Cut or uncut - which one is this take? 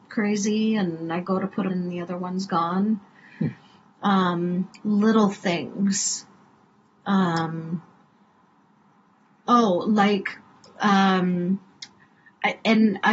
cut